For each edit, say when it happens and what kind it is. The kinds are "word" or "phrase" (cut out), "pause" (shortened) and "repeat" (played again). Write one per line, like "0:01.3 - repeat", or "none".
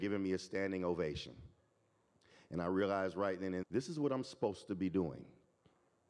0:03.6 - word

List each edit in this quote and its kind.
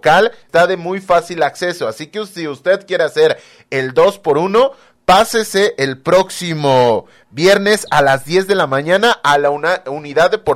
none

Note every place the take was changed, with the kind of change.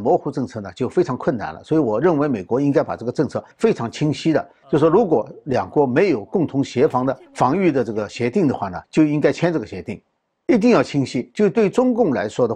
0:03.5 - pause
0:07.3 - pause
0:08.8 - pause
0:10.2 - pause

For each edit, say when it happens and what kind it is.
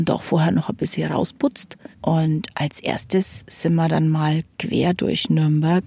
0:01.9 - pause

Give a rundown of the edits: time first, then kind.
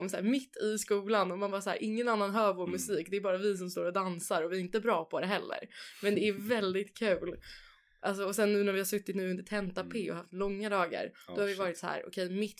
none

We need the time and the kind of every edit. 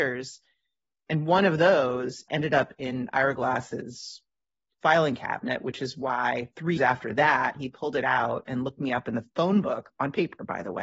0:06.8 - word

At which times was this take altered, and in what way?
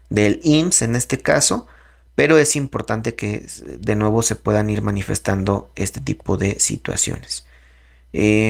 none

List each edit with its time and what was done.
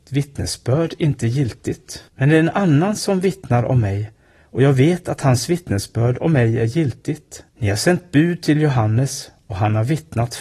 0:02.1 - pause
0:07.5 - pause

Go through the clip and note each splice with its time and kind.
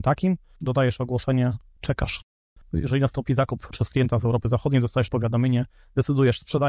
none

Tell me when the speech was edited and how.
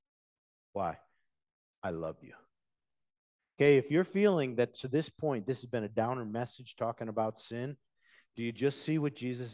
none

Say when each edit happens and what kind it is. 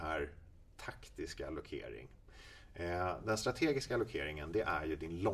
none

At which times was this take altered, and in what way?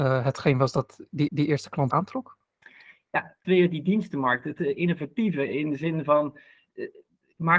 0:01.3 - repeat
0:01.9 - phrase
0:03.4 - phrase

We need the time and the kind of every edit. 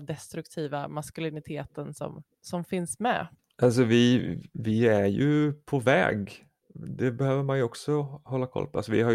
0:03.3 - pause

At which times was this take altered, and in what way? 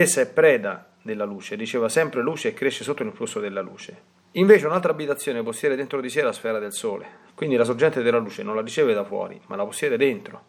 0:04.2 - pause
0:07.3 - pause

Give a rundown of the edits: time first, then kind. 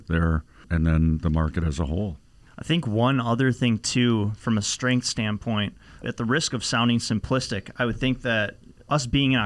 none

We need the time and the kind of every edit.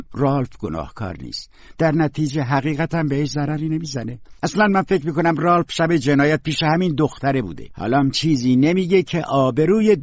none

